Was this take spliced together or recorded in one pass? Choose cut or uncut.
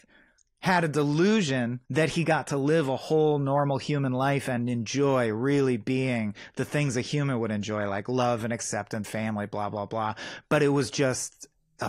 cut